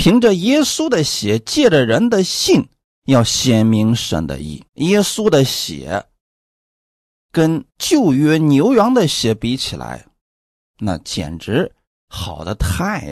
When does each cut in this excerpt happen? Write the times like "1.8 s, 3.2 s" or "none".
4.7 s, 7.7 s